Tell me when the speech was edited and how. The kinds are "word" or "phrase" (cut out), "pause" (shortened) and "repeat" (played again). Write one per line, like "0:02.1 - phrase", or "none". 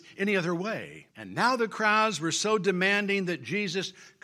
0:01.1 - pause